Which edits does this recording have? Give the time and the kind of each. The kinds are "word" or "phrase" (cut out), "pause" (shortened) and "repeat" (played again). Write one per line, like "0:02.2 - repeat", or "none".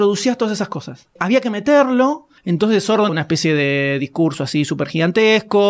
0:02.4 - pause
0:03.1 - phrase